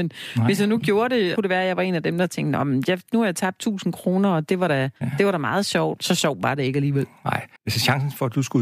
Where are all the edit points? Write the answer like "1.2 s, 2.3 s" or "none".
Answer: 1.4 s, 5.0 s, 6.0 s, 7.6 s